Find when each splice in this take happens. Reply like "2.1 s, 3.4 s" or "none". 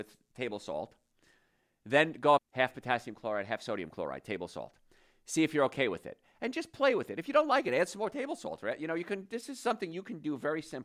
2.4 s

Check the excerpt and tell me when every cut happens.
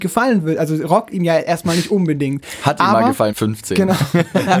1.1 s, 3.3 s

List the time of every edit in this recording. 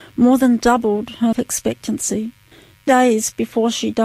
1.3 s, 2.9 s

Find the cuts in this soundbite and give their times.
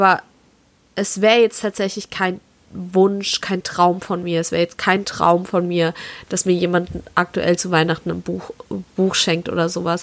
none

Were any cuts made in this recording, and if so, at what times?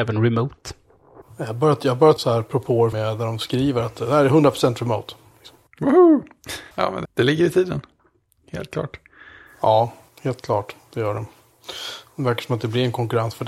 2.2 s, 2.9 s, 6.7 s, 7.1 s

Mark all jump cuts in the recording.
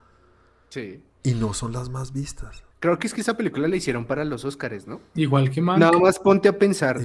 1.1 s, 2.7 s

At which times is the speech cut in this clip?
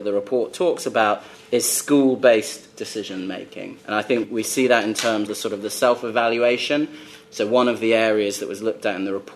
3.8 s, 4.2 s, 5.3 s

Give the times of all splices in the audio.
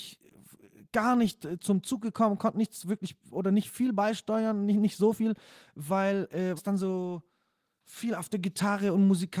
1.6 s, 6.6 s

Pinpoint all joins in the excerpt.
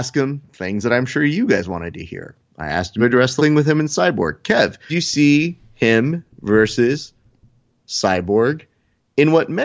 2.5 s, 3.0 s, 3.4 s, 4.9 s

